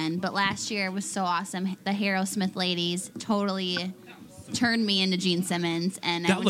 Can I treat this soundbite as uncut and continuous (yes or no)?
yes